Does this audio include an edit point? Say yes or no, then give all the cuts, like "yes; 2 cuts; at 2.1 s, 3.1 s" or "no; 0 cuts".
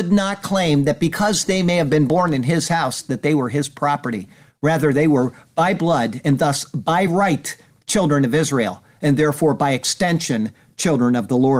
no; 0 cuts